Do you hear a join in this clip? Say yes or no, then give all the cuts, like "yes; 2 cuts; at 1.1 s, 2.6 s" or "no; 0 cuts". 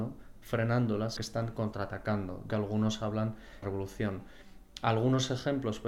yes; 3 cuts; at 1.2 s, 2.5 s, 3.6 s